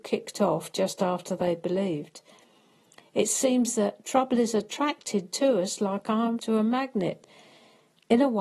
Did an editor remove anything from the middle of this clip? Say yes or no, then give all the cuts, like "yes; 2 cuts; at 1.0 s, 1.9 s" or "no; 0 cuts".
yes; 1 cut; at 6.4 s